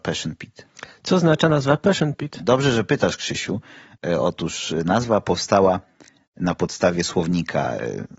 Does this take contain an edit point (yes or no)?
no